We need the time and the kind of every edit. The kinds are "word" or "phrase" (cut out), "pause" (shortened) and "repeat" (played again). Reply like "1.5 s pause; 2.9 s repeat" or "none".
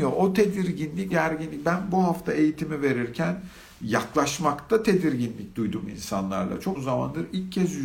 1.1 s word; 6.8 s word